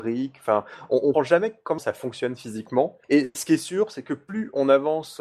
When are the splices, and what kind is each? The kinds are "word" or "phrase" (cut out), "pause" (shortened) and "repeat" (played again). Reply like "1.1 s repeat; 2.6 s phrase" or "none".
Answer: 1.1 s word; 1.8 s word; 3.0 s pause